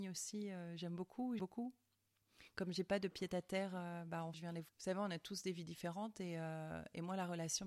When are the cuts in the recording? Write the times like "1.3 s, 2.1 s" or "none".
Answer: 1.4 s, 4.3 s, 4.7 s